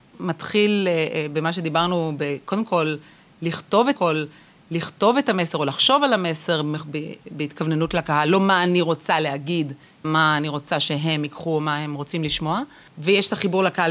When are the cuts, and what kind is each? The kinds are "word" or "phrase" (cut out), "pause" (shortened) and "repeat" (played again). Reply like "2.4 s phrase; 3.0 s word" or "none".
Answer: 4.0 s repeat; 10.0 s word

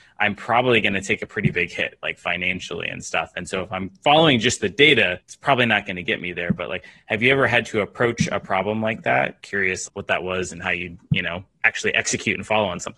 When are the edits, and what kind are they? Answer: 9.9 s word

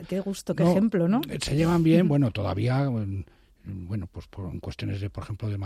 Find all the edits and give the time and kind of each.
none

